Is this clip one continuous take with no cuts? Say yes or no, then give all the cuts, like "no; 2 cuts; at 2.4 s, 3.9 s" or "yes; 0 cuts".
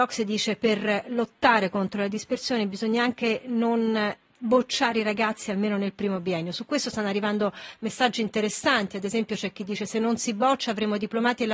yes; 0 cuts